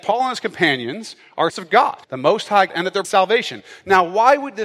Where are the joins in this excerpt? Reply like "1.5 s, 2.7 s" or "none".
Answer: 1.5 s, 2.0 s, 2.7 s, 3.0 s